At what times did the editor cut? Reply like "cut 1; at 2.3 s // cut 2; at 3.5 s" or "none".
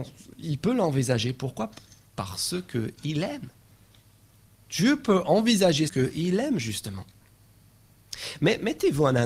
cut 1; at 4.3 s // cut 2; at 5.9 s